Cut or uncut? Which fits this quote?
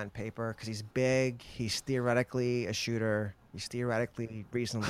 uncut